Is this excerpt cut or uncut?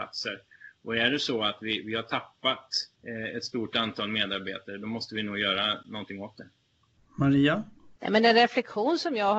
cut